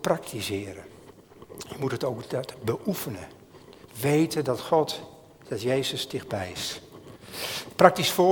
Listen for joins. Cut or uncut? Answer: uncut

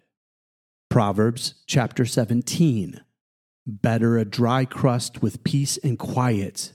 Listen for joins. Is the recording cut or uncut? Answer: uncut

